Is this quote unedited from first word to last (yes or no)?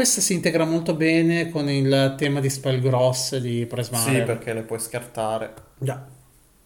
yes